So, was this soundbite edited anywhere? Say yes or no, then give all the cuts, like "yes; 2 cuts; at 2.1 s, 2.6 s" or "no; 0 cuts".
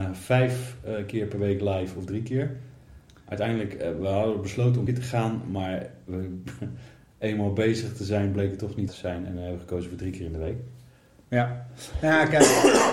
yes; 2 cuts; at 4.9 s, 8.9 s